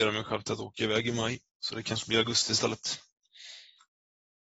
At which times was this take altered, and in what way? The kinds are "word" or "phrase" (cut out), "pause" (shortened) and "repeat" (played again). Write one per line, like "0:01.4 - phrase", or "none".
none